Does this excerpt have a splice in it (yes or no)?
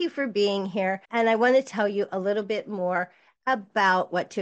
yes